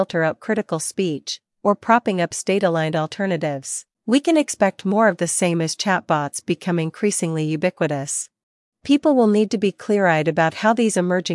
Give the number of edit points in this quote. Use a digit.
2